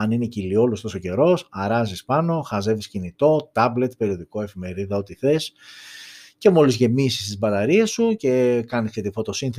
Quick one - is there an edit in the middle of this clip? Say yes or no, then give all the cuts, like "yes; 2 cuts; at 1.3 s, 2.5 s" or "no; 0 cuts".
no; 0 cuts